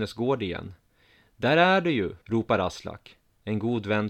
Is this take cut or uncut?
cut